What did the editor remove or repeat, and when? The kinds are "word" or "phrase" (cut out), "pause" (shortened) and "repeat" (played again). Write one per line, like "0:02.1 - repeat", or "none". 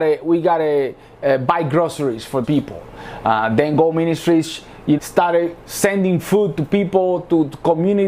0:02.4 - word
0:05.0 - word